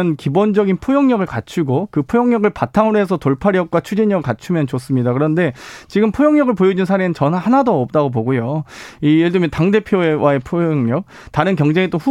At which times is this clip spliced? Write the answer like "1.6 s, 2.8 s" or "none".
none